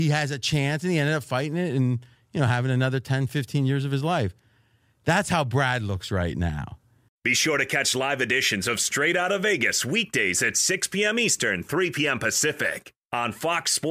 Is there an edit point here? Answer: no; 0 cuts

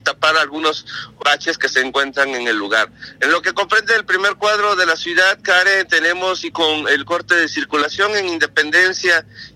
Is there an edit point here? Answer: yes; 2 cuts; at 1.2 s, 6.5 s

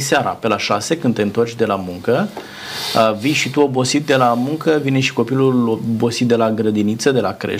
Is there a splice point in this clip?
no; 0 cuts

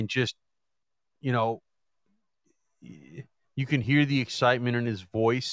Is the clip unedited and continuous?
yes; 0 cuts

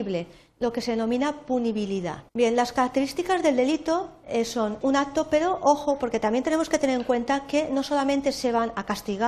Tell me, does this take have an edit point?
yes; 2 cuts; at 2.3 s, 4.8 s

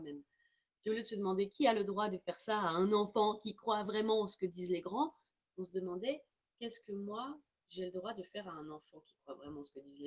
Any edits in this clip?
no; 0 cuts

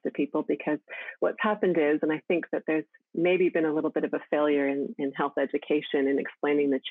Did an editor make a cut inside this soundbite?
no; 0 cuts

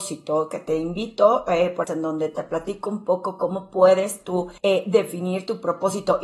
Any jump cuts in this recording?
yes; 2 cuts; at 1.8 s, 4.6 s

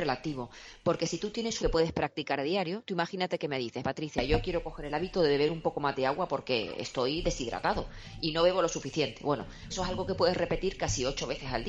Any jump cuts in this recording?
yes; 3 cuts; at 1.6 s, 3.8 s, 9.7 s

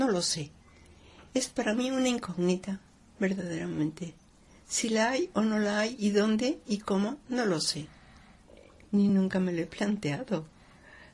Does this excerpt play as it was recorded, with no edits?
yes; 0 cuts

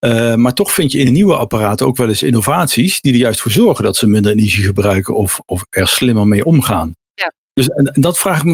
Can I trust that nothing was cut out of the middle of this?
yes; 0 cuts

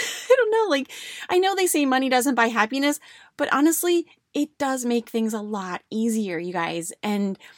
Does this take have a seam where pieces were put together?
no; 0 cuts

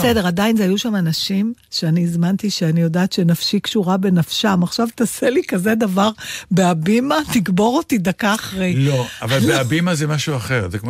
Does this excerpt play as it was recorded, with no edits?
yes; 0 cuts

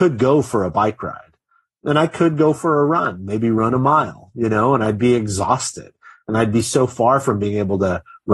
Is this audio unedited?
yes; 0 cuts

